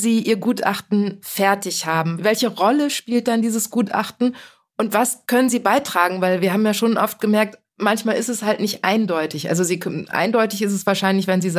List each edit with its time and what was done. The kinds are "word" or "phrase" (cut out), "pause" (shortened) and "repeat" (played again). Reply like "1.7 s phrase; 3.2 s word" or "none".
none